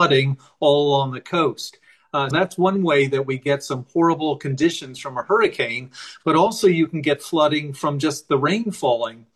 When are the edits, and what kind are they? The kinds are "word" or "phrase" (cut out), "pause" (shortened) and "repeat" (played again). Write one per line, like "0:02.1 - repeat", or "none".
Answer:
0:02.3 - word